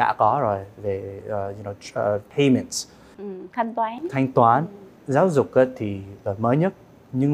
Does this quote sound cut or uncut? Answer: uncut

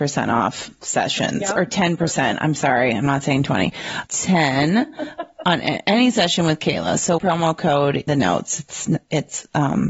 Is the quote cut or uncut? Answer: cut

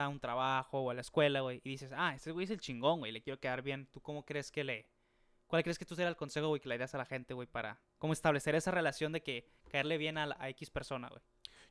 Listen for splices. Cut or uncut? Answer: uncut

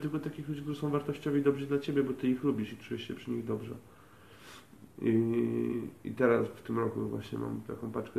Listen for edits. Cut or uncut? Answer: uncut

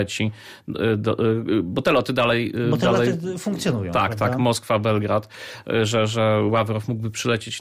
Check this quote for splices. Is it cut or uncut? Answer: uncut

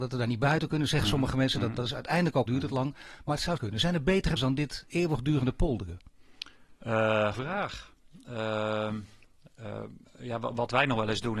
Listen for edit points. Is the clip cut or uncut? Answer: cut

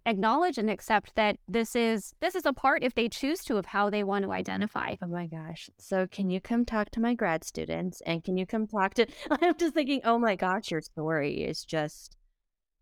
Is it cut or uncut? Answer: cut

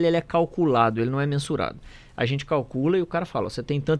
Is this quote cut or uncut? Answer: uncut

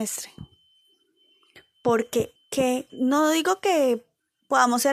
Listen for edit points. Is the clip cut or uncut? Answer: cut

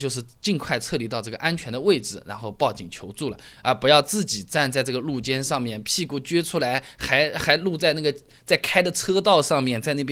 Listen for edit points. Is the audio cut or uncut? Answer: uncut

